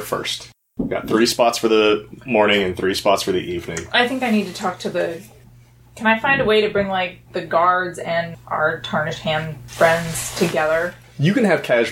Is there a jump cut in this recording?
no; 0 cuts

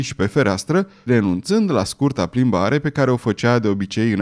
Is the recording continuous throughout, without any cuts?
no; 1 cut; at 1.1 s

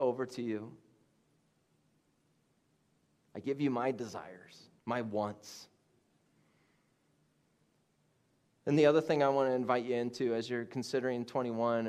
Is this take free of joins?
no; 1 cut; at 4.8 s

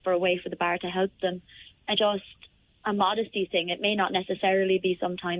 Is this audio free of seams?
no; 1 cut; at 1.9 s

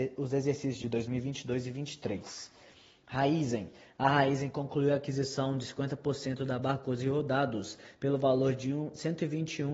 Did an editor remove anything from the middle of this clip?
no; 0 cuts

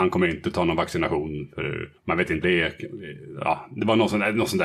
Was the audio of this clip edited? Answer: yes; 2 cuts; at 2.0 s, 2.4 s

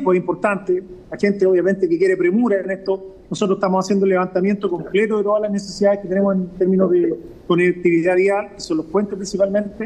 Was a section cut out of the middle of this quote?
no; 0 cuts

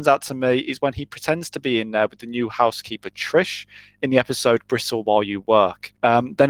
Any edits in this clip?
no; 0 cuts

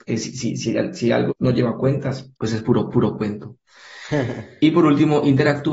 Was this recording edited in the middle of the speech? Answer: yes; 3 cuts; at 1.3 s, 2.3 s, 2.9 s

